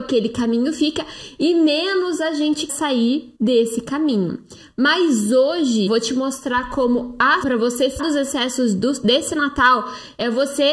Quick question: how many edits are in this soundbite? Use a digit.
5